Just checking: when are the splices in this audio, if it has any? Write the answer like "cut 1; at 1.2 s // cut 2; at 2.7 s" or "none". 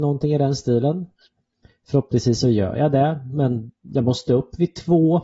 none